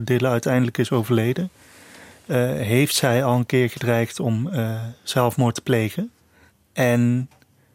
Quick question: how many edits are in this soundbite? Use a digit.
0